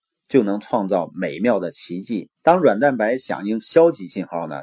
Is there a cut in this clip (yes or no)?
yes